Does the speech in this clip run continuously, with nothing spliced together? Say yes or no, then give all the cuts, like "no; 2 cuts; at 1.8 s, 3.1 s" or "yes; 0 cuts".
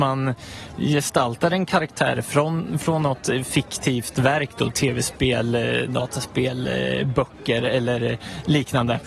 yes; 0 cuts